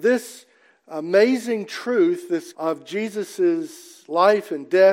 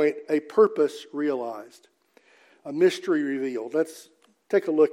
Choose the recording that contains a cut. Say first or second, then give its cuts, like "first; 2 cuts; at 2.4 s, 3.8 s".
first; 1 cut; at 2.5 s